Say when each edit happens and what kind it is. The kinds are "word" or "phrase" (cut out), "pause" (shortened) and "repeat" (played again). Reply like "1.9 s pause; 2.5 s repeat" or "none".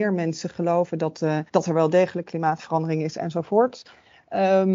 1.5 s pause